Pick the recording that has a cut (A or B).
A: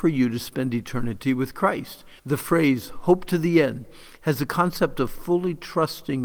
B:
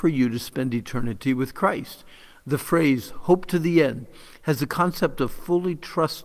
A